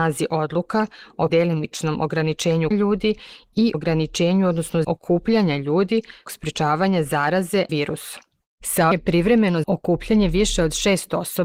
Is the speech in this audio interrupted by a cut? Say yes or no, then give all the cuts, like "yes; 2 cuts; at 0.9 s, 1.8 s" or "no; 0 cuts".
yes; 8 cuts; at 1.3 s, 2.7 s, 3.7 s, 4.8 s, 6.3 s, 7.7 s, 8.9 s, 9.6 s